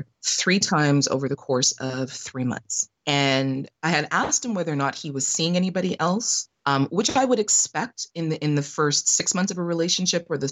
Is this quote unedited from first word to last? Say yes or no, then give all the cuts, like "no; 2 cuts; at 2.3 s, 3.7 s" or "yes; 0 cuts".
no; 1 cut; at 3.7 s